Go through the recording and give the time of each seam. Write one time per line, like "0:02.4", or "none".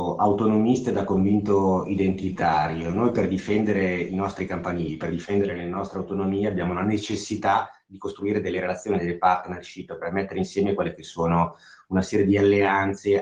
none